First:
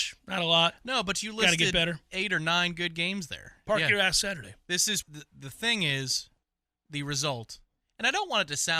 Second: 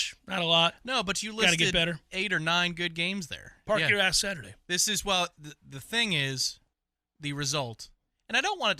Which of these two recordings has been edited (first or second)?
first